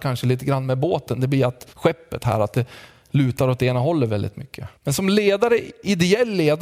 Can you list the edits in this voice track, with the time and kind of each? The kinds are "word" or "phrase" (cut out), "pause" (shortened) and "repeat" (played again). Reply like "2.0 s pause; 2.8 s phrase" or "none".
1.7 s pause; 4.8 s pause